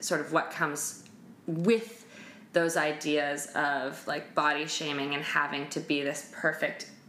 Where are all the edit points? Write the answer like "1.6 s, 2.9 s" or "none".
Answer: 1.4 s